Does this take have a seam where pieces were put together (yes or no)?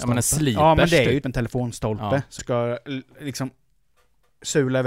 yes